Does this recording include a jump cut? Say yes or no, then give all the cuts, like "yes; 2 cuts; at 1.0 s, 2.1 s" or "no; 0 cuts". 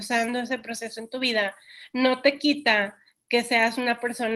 no; 0 cuts